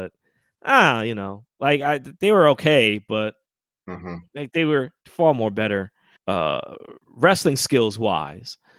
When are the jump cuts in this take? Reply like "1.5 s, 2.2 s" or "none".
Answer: 6.2 s